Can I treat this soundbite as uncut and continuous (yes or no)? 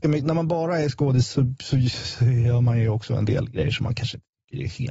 yes